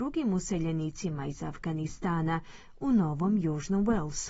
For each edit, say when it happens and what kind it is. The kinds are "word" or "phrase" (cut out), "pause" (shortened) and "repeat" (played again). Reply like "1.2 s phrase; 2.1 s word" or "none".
none

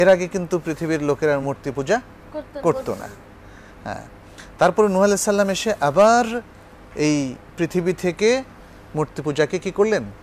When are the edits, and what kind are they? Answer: none

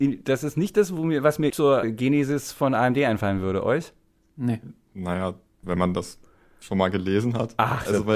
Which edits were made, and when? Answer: 1.5 s word; 1.8 s word; 5.6 s word

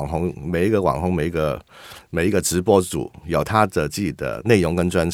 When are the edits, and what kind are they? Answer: none

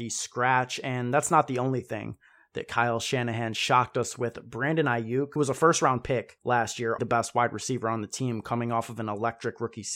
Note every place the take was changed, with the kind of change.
7.0 s word

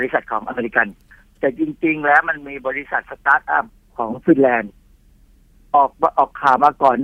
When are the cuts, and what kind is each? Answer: none

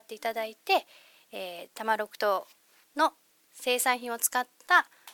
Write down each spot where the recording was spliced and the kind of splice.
none

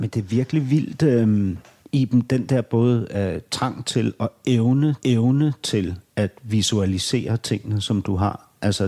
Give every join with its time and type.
1.8 s pause; 5.0 s repeat

